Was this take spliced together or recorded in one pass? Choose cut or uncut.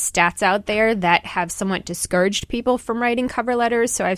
uncut